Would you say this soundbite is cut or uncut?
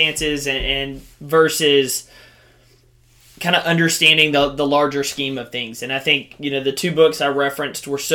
uncut